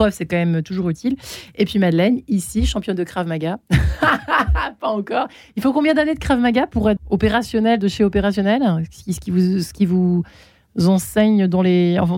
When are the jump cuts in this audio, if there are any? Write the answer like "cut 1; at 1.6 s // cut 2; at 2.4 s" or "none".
cut 1; at 7.0 s